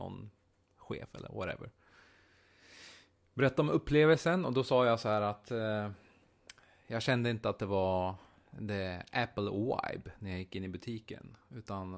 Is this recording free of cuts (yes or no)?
yes